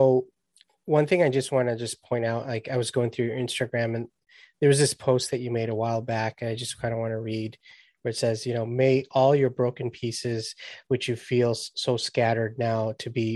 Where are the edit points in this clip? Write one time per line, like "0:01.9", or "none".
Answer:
none